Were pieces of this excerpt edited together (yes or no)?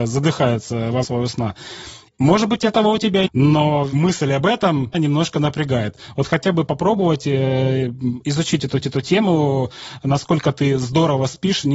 yes